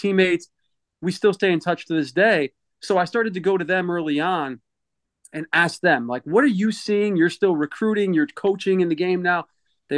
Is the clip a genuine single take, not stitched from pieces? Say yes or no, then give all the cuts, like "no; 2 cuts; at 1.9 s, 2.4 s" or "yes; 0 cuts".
yes; 0 cuts